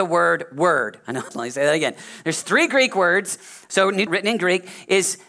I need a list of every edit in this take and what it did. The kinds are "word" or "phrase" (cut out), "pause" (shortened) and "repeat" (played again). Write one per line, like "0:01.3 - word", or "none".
0:01.3 - word
0:04.1 - word